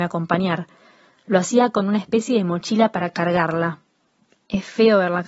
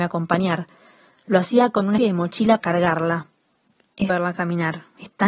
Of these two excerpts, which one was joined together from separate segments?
second; 3 cuts; at 2.0 s, 2.6 s, 4.1 s

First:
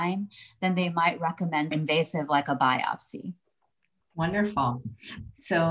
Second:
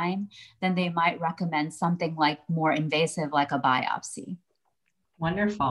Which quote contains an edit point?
first; 1 cut; at 1.7 s

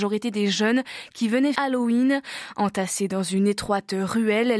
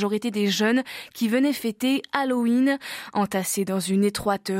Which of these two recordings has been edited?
first; 1 cut; at 1.5 s

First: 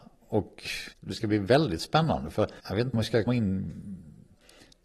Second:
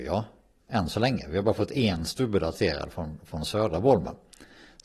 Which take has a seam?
first; 4 cuts; at 0.9 s, 2.6 s, 2.9 s, 3.3 s

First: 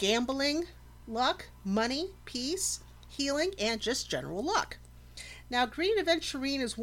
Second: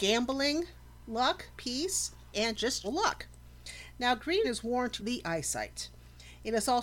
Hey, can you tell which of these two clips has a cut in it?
second; 5 cuts; at 1.5 s, 2.3 s, 2.8 s, 4.4 s, 5.0 s

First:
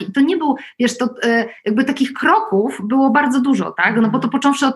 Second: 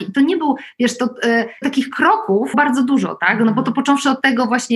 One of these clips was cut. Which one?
second; 2 cuts; at 1.6 s, 2.5 s

